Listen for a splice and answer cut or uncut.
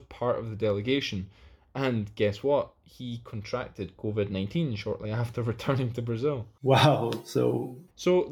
uncut